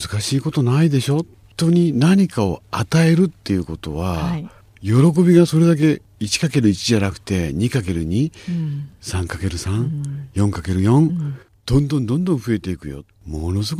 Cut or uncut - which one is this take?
uncut